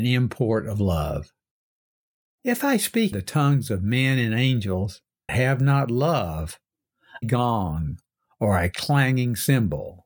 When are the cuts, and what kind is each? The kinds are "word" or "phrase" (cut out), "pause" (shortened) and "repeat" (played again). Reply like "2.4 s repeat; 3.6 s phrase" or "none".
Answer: 1.7 s pause; 3.1 s word; 5.3 s word; 7.2 s phrase

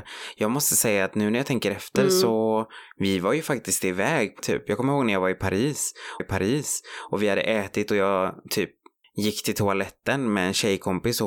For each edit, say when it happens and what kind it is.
4.4 s word; 6.2 s repeat; 9.0 s pause

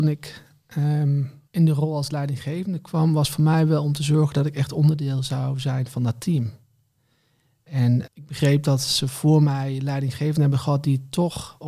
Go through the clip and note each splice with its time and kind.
1.5 s pause; 8.1 s word

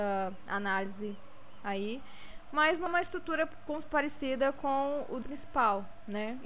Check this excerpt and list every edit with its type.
2.9 s word; 3.8 s word; 5.2 s word

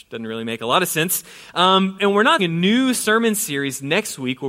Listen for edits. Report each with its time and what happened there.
2.0 s word; 2.4 s phrase

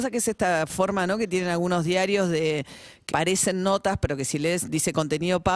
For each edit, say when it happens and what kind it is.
3.1 s phrase

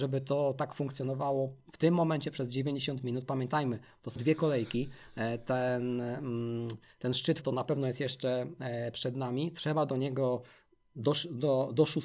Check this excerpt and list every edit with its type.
4.2 s word; 7.4 s word

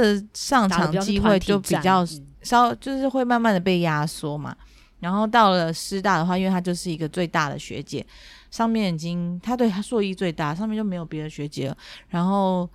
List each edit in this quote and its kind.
2.3 s pause

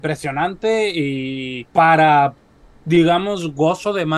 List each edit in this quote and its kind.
1.7 s pause

